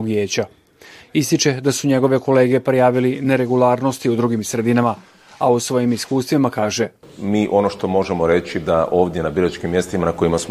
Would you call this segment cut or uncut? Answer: uncut